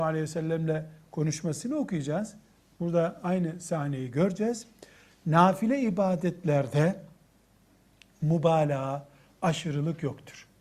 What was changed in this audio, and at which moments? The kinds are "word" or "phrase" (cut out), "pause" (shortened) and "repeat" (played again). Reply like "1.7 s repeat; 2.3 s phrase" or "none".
none